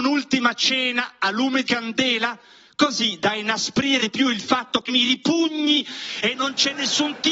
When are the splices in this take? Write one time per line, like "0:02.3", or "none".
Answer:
0:01.6
0:04.0
0:04.9